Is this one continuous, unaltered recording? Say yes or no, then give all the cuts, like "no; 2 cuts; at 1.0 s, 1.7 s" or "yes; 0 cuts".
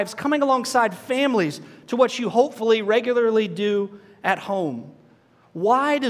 yes; 0 cuts